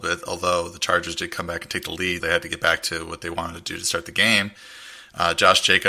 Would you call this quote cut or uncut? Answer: cut